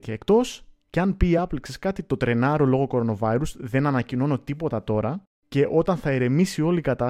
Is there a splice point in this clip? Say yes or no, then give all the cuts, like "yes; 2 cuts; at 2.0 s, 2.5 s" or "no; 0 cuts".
no; 0 cuts